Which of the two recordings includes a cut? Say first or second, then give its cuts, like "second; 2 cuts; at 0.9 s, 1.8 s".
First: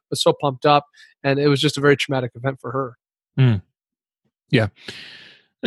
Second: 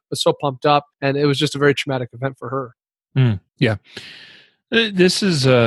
second; 2 cuts; at 0.9 s, 3.5 s